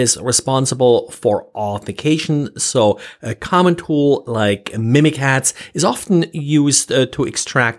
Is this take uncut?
yes; 0 cuts

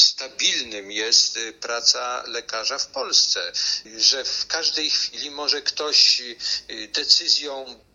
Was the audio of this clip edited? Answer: no; 0 cuts

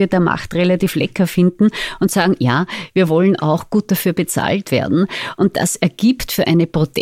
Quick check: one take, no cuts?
yes; 0 cuts

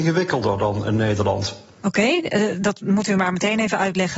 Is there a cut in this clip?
no; 0 cuts

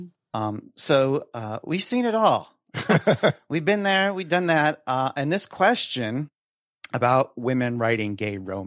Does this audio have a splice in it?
no; 0 cuts

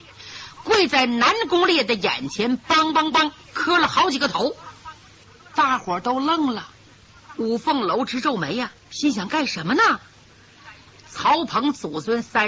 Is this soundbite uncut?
yes; 0 cuts

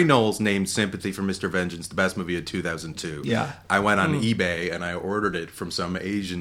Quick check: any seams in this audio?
no; 0 cuts

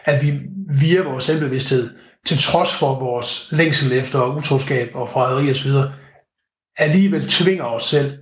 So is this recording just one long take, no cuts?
yes; 0 cuts

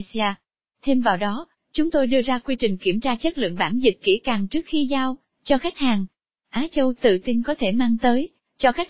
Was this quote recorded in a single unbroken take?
yes; 0 cuts

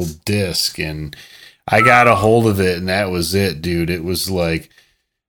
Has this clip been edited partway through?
no; 0 cuts

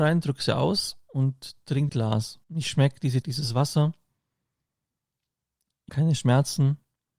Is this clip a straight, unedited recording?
no; 4 cuts; at 1.9 s, 2.4 s, 3.2 s, 5.9 s

